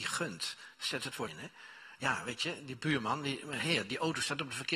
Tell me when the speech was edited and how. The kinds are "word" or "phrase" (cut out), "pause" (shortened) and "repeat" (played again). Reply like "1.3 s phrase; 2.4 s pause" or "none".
1.3 s word